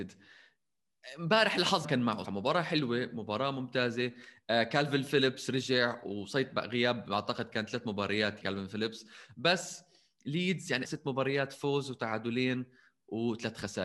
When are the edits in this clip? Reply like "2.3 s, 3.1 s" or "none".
1.8 s, 2.2 s, 8.4 s, 10.8 s